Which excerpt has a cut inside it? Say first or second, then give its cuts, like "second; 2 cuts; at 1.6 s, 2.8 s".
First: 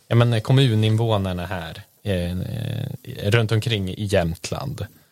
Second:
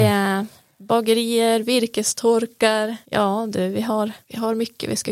second; 2 cuts; at 3.0 s, 4.2 s